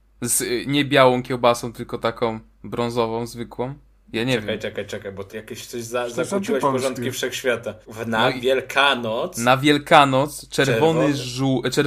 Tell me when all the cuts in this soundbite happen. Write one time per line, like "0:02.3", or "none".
0:04.0
0:04.9
0:05.3
0:07.8